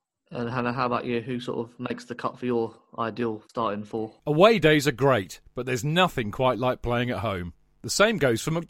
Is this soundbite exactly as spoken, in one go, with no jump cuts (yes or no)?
no